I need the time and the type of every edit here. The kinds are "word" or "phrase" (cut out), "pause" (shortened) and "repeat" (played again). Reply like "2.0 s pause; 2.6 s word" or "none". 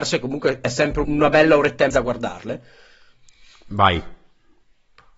1.0 s word; 1.9 s word